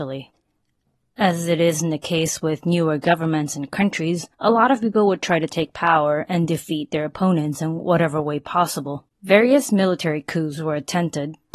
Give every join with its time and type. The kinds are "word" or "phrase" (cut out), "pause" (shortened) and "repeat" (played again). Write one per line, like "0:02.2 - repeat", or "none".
0:04.3 - pause
0:09.1 - pause